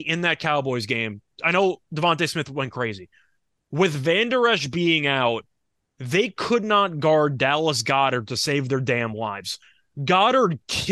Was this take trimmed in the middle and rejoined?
no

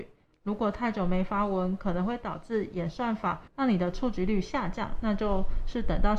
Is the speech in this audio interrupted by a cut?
yes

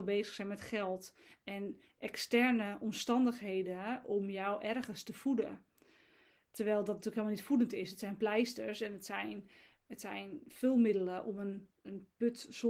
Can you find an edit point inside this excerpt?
no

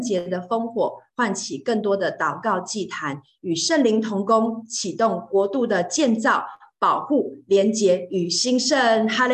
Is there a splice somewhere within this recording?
no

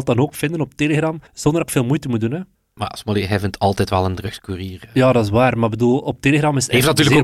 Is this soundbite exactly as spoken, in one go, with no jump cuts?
no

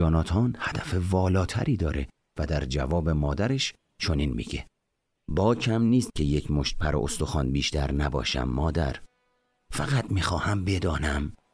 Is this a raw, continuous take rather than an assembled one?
yes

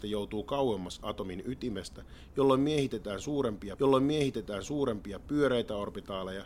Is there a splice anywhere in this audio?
yes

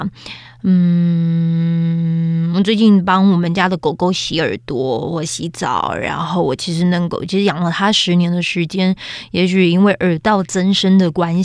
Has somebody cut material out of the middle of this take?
no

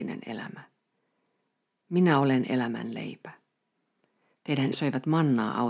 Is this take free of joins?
no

